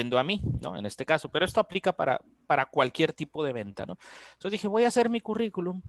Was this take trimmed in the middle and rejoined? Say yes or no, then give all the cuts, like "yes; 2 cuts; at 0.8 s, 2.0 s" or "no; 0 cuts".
no; 0 cuts